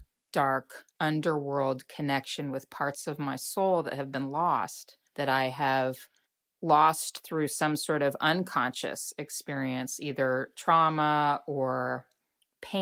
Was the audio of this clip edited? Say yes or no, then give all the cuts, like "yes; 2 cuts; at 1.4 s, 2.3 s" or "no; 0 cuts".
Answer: yes; 3 cuts; at 0.9 s, 5.1 s, 6.3 s